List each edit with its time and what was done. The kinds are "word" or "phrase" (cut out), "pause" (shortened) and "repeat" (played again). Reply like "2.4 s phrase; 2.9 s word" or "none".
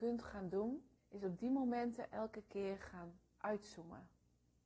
1.0 s pause